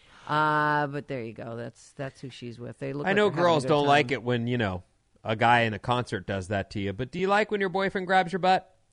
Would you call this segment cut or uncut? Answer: uncut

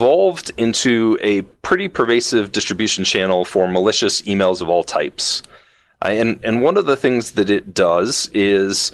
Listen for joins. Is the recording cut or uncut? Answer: uncut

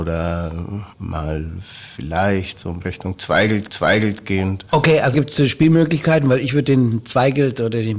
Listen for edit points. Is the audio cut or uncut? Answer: cut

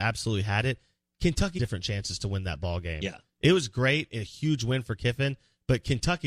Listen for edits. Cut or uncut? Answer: cut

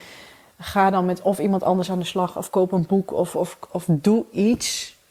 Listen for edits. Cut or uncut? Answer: uncut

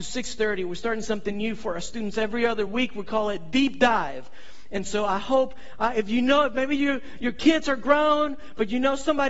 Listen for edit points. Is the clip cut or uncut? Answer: uncut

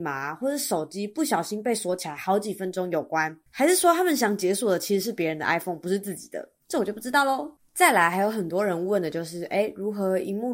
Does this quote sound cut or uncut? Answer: cut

